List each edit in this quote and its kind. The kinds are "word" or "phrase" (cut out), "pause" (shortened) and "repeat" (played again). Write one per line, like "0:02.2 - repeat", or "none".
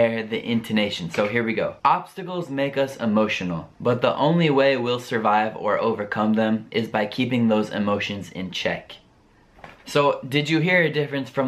0:01.8 - pause
0:03.7 - pause
0:09.8 - pause